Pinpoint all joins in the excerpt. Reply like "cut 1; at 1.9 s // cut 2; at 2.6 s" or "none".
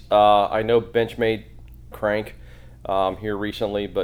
cut 1; at 1.9 s